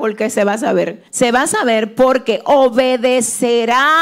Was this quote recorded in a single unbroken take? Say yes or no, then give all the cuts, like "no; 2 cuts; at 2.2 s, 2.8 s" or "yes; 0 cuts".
no; 1 cut; at 1.1 s